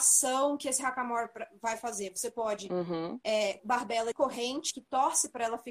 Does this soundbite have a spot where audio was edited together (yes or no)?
yes